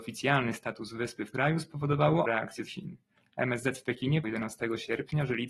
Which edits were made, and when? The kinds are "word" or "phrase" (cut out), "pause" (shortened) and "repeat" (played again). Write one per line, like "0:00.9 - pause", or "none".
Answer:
0:01.3 - word
0:02.2 - word
0:02.7 - word
0:04.2 - word